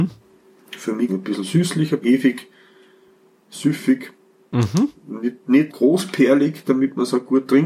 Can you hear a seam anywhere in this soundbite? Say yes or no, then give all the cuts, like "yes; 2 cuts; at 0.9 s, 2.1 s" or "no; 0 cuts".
yes; 3 cuts; at 1.1 s, 2.0 s, 5.7 s